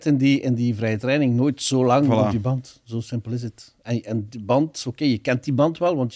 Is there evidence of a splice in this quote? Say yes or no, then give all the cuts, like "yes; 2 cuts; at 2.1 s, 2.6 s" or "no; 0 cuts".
no; 0 cuts